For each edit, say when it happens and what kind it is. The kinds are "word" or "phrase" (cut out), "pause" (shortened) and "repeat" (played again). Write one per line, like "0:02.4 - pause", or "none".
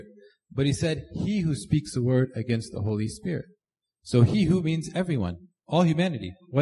none